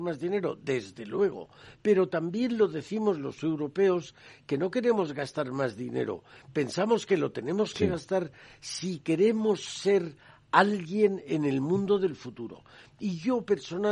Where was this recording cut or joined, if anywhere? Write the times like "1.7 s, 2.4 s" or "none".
none